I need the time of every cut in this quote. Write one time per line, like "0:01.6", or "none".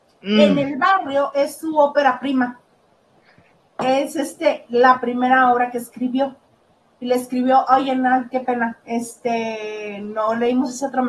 none